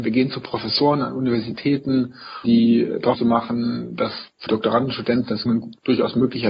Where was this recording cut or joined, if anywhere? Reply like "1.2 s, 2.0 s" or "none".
2.4 s, 3.1 s, 4.5 s, 5.5 s